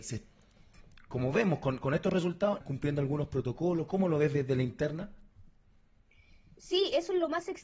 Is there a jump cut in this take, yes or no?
yes